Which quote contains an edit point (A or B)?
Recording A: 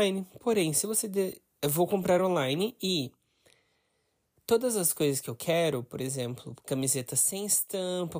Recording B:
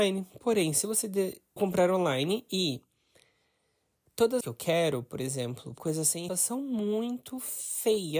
B